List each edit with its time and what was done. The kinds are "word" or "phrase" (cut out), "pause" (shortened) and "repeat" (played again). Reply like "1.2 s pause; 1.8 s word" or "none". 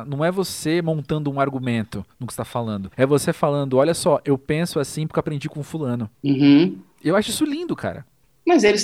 2.9 s pause; 6.1 s pause